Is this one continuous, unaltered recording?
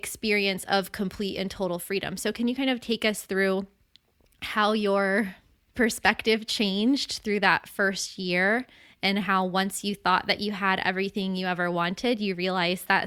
yes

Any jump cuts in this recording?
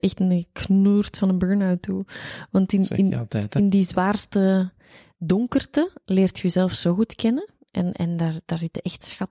no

